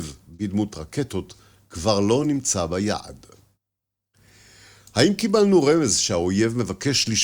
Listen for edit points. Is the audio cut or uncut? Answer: uncut